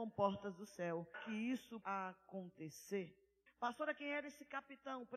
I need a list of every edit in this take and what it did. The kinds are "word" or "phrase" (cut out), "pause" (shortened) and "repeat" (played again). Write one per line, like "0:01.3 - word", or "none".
0:01.1 - word
0:01.8 - word
0:03.5 - pause